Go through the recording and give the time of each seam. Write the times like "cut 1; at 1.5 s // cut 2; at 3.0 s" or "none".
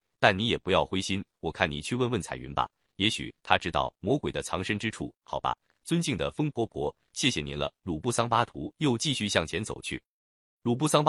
none